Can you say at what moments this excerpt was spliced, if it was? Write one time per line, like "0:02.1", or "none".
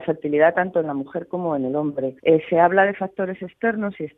0:02.2